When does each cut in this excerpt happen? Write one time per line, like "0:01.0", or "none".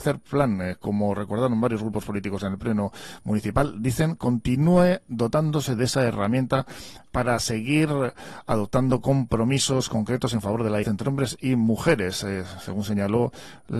0:10.8